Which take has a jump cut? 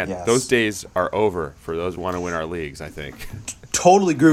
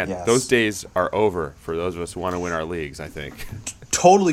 first; 1 cut; at 1.9 s

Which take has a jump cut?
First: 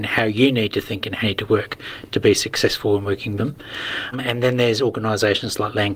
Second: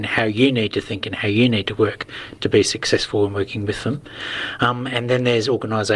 first; 3 cuts; at 1.2 s, 3.4 s, 4.1 s

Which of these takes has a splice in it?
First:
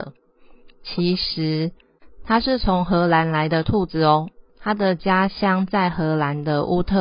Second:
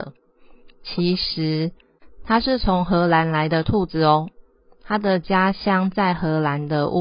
first; 1 cut; at 4.5 s

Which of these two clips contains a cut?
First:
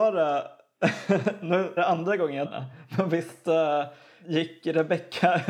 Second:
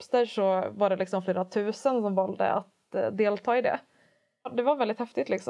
first; 2 cuts; at 1.8 s, 2.4 s

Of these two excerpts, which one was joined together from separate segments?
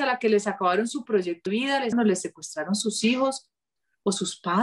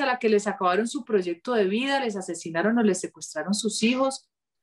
first; 2 cuts; at 1.5 s, 1.9 s

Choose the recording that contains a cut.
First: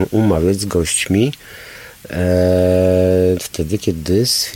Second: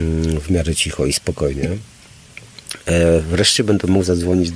first; 1 cut; at 3.4 s

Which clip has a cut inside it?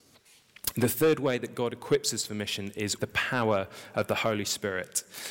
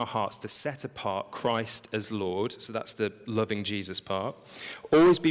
first; 1 cut; at 3.0 s

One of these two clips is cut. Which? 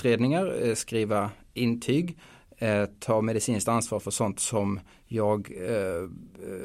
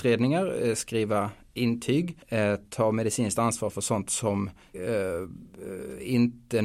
second; 2 cuts; at 2.2 s, 4.7 s

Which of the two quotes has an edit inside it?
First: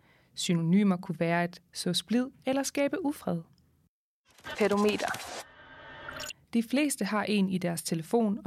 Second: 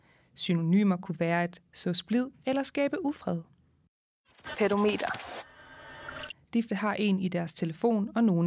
second; 1 cut; at 6.7 s

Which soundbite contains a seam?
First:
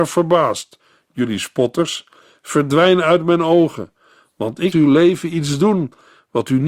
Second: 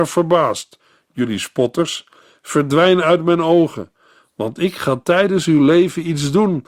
first; 1 cut; at 4.7 s

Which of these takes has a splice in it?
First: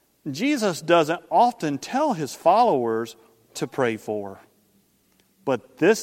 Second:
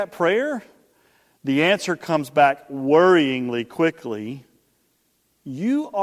first; 1 cut; at 3.5 s

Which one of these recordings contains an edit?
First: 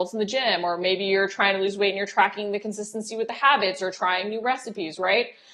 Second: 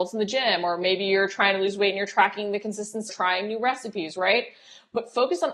second; 1 cut; at 3.1 s

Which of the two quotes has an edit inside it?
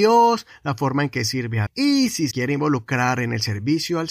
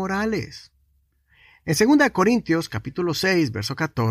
first; 2 cuts; at 1.7 s, 2.3 s

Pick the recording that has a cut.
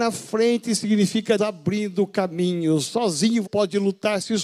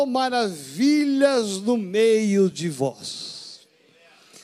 first; 2 cuts; at 1.4 s, 3.4 s

